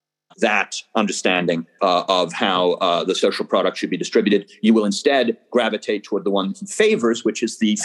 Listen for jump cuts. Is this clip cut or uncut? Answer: cut